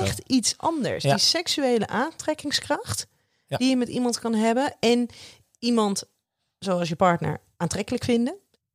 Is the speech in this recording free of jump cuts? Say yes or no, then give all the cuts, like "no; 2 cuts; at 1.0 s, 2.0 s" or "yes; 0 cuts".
yes; 0 cuts